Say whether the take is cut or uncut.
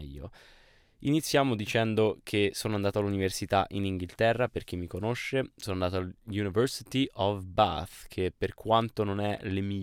uncut